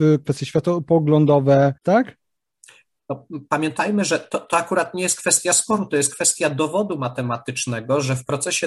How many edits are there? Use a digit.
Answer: 1